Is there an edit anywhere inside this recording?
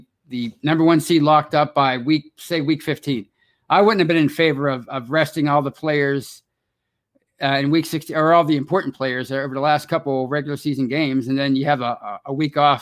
no; 0 cuts

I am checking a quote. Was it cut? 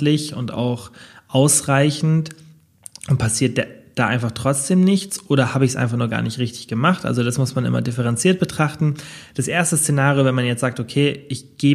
no; 0 cuts

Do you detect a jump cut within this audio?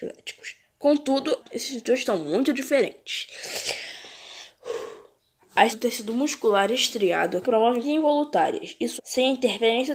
yes; 6 cuts; at 1.4 s, 2.0 s, 5.7 s, 7.4 s, 7.8 s, 9.0 s

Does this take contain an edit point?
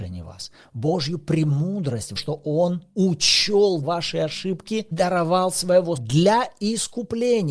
yes; 4 cuts; at 2.2 s, 3.8 s, 4.9 s, 6.0 s

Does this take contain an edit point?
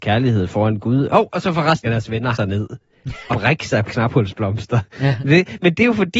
yes; 4 cuts; at 1.8 s, 2.3 s, 3.3 s, 3.9 s

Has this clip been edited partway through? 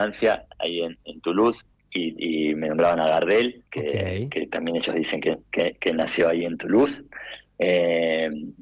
yes; 2 cuts; at 1.7 s, 3.7 s

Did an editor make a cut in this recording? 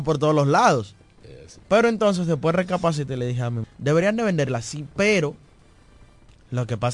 yes; 2 cuts; at 1.6 s, 3.6 s

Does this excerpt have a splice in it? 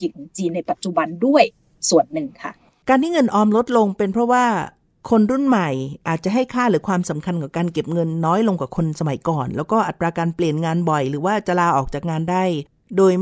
no; 0 cuts

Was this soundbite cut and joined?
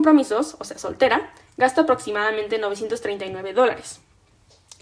no; 0 cuts

